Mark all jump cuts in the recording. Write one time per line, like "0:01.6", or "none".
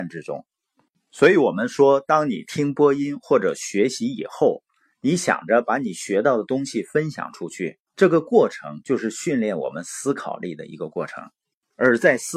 none